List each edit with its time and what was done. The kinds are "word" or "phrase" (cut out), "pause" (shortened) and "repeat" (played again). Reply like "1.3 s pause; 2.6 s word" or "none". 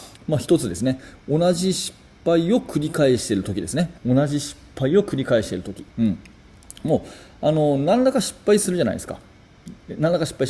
4.0 s pause; 5.9 s pause